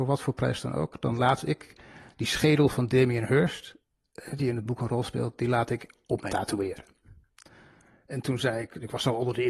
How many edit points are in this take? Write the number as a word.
one